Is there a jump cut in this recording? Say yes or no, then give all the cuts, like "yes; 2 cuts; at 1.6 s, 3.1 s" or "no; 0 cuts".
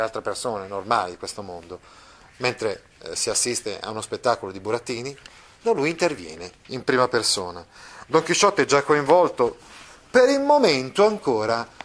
yes; 1 cut; at 6.6 s